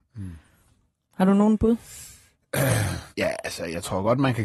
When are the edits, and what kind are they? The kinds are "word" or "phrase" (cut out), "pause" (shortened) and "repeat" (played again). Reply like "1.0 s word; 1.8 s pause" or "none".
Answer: 3.1 s pause

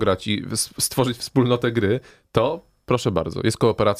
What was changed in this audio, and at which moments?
2.1 s pause

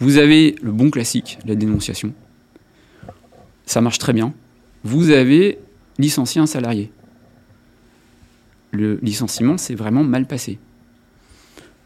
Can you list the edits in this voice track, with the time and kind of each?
none

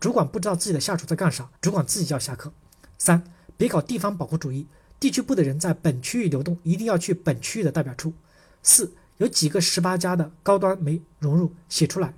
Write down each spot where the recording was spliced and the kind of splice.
1.6 s pause

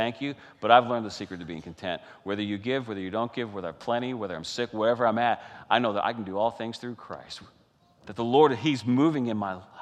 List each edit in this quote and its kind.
none

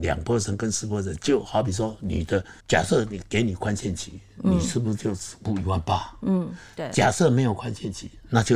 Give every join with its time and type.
2.6 s pause

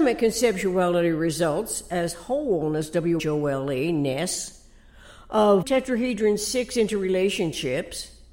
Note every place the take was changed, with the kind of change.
3.2 s word; 5.6 s word

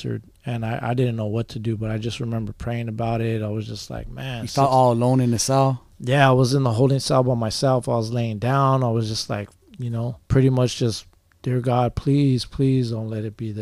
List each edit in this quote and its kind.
5.9 s pause; 10.2 s pause

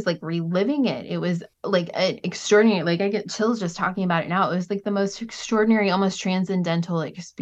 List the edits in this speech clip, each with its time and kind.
1.5 s pause

